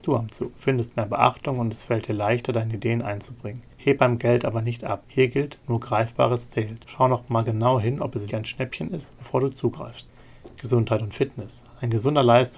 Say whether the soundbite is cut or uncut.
cut